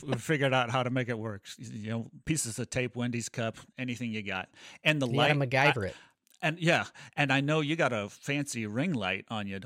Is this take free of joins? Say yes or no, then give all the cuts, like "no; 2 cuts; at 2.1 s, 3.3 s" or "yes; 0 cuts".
no; 1 cut; at 3.7 s